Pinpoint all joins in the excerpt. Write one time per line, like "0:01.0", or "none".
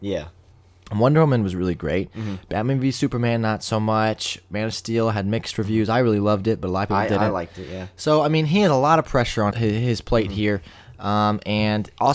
0:09.5